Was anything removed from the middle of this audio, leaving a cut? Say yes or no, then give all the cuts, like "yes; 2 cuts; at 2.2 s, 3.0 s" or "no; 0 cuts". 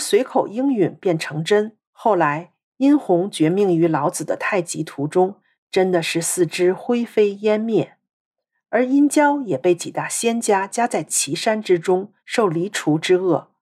yes; 2 cuts; at 1.8 s, 12.2 s